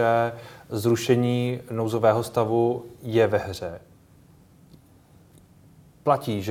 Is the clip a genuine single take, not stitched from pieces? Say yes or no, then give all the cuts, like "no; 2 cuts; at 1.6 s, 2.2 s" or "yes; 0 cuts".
yes; 0 cuts